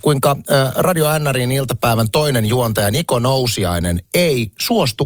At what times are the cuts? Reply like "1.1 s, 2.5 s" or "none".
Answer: none

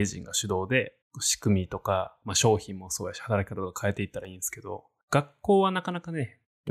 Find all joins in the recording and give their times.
1.0 s

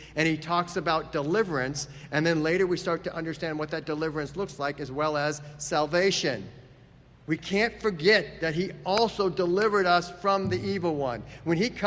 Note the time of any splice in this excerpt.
none

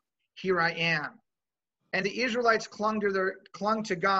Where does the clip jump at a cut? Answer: 2.0 s

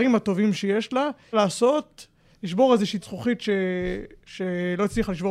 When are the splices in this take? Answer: 1.3 s, 3.0 s

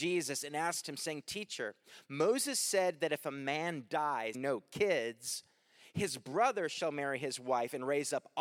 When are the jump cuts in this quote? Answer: 4.3 s

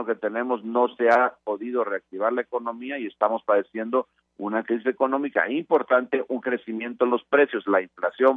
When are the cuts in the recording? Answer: none

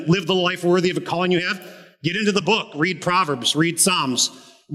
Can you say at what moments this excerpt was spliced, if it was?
none

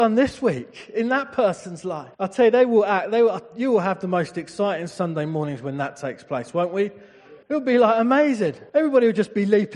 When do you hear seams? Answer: 2.1 s, 7.4 s, 8.7 s

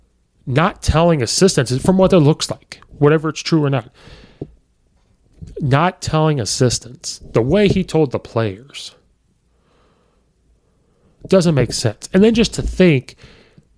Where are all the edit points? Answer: none

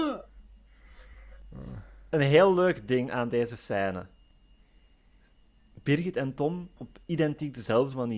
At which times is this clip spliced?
6.8 s

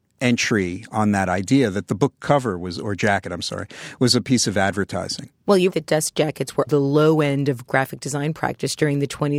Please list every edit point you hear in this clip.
5.4 s, 5.7 s, 6.7 s

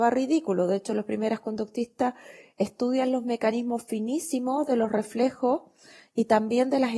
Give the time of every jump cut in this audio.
none

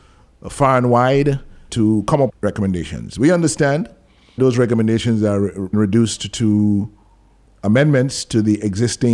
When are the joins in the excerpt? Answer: 1.7 s, 2.3 s, 4.4 s, 5.7 s, 7.4 s

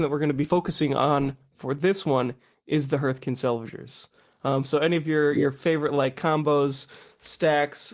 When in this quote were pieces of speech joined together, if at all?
none

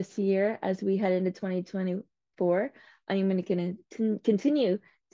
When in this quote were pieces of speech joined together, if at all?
none

